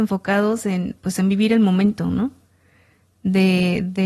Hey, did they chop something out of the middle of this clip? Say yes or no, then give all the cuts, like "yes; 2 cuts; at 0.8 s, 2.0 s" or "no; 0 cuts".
no; 0 cuts